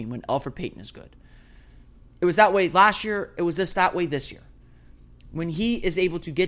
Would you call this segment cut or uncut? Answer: uncut